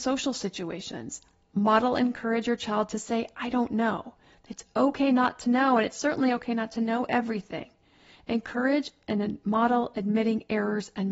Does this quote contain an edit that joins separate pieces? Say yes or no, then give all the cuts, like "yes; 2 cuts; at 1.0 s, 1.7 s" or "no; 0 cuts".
no; 0 cuts